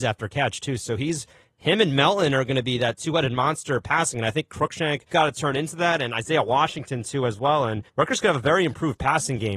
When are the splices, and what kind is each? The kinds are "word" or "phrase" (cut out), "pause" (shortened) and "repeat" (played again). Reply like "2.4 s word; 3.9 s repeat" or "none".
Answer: 5.1 s word; 7.9 s pause